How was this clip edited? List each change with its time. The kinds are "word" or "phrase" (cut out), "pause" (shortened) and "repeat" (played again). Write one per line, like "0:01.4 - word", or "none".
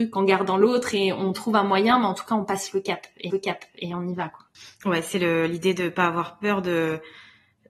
0:03.3 - repeat